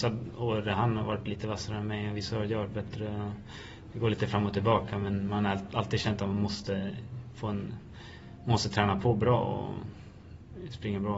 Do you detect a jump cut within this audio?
no; 0 cuts

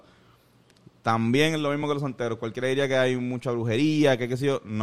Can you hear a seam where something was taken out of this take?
no; 0 cuts

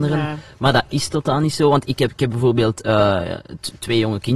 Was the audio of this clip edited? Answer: no; 0 cuts

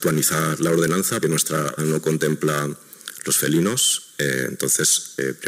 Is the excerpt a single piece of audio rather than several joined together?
no; 2 cuts; at 1.2 s, 1.8 s

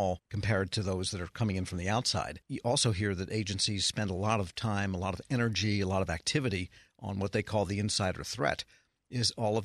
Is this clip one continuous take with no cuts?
yes; 0 cuts

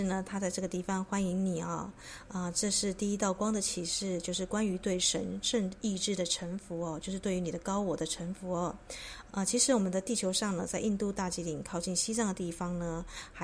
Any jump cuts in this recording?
yes; 1 cut; at 9.3 s

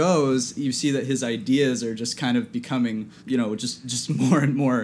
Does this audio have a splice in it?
yes; 1 cut; at 3.2 s

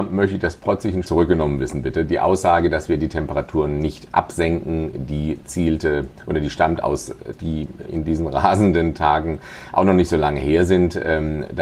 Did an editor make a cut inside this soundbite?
yes; 3 cuts; at 1.0 s, 7.4 s, 7.9 s

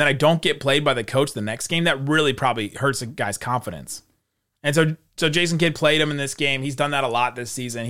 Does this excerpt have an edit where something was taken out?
no; 0 cuts

